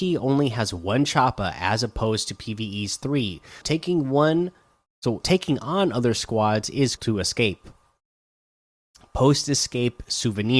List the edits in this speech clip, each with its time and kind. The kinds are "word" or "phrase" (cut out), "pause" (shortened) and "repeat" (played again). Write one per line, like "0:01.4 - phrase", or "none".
0:03.6 - word
0:05.2 - word
0:07.0 - word